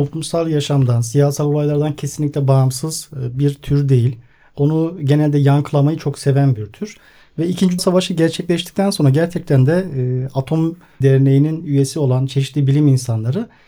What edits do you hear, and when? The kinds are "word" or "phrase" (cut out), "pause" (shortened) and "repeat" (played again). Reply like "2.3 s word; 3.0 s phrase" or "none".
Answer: 7.8 s word; 11.0 s word